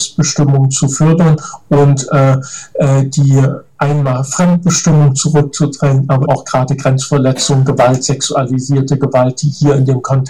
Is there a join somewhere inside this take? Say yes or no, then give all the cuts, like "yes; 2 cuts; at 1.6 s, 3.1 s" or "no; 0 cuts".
yes; 1 cut; at 6.3 s